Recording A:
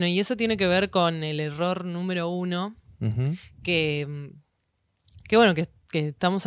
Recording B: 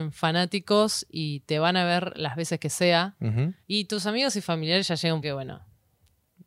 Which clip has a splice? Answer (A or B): B